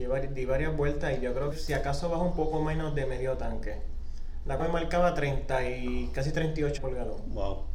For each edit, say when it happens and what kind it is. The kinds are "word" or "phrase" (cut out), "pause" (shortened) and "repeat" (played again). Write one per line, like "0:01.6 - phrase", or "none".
0:01.5 - word
0:04.6 - word
0:06.8 - word